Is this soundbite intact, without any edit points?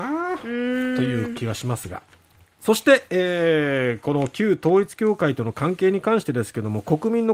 yes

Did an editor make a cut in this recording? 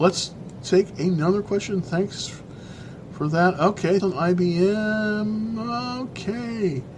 yes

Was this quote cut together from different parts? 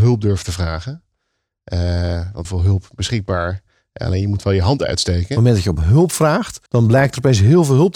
yes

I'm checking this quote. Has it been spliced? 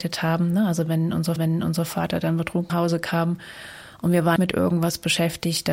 yes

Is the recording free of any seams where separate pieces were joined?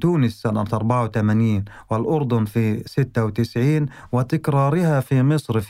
yes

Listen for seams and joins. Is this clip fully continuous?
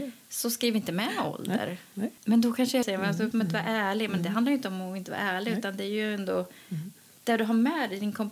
no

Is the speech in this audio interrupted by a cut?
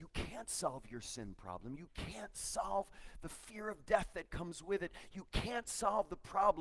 no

